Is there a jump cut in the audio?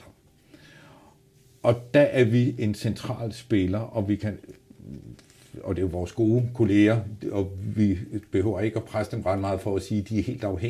no; 0 cuts

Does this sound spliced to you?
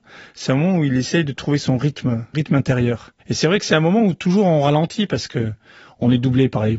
yes; 2 cuts; at 2.3 s, 3.2 s

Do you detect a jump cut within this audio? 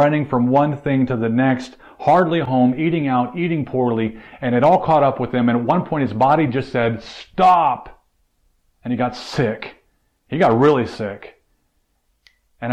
no; 0 cuts

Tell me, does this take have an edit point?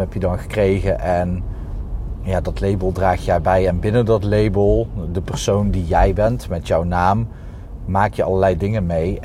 no; 0 cuts

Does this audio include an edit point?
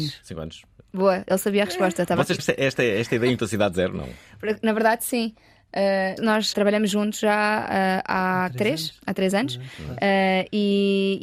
yes; 4 cuts; at 2.4 s, 3.4 s, 6.2 s, 6.5 s

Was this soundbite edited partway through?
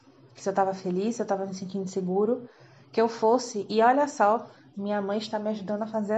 no; 0 cuts

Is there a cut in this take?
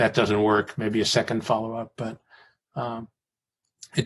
no; 0 cuts

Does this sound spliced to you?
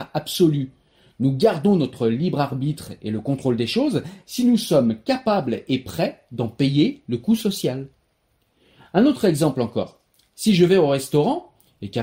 no; 0 cuts

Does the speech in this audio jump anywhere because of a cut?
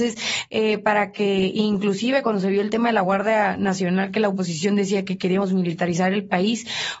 no; 0 cuts

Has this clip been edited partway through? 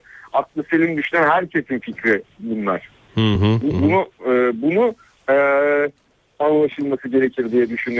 no; 0 cuts

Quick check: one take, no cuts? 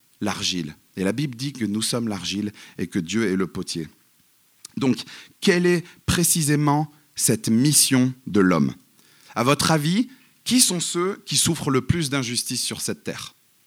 yes; 0 cuts

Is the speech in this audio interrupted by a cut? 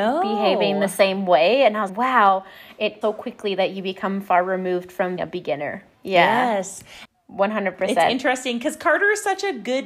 yes; 4 cuts; at 1.9 s, 3.0 s, 5.2 s, 5.9 s

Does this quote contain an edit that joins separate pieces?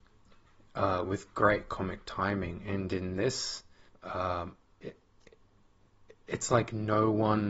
yes; 1 cut; at 3.9 s

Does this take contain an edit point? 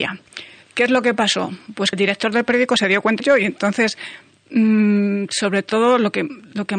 yes; 2 cuts; at 1.9 s, 3.2 s

